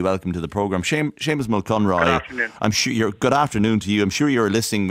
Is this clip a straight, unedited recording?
yes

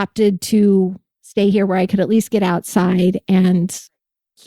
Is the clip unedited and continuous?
yes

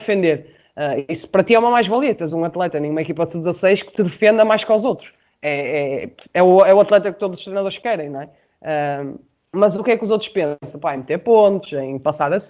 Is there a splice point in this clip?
no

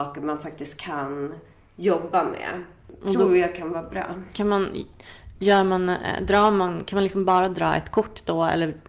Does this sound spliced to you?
no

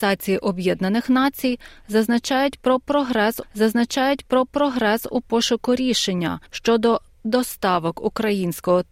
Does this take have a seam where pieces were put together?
yes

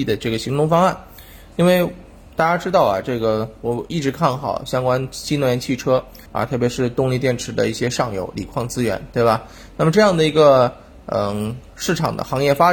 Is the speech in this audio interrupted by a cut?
yes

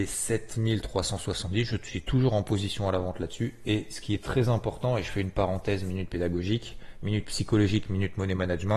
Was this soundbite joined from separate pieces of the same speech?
no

